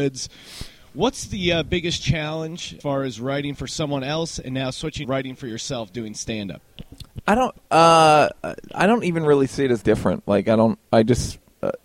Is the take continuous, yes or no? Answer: no